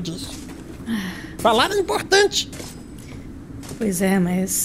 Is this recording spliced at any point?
no; 0 cuts

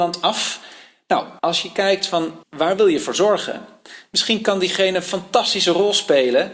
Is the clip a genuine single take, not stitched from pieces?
no; 2 cuts; at 1.4 s, 2.4 s

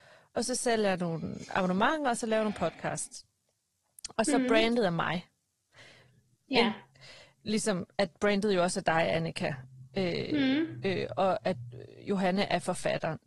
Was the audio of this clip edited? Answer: no; 0 cuts

